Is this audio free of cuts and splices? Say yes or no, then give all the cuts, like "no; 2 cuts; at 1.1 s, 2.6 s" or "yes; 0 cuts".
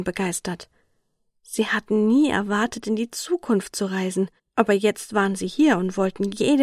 no; 1 cut; at 4.4 s